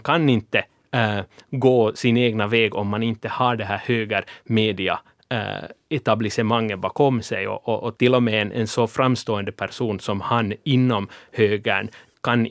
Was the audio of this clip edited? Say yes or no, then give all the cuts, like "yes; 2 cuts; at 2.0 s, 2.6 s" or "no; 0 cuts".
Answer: no; 0 cuts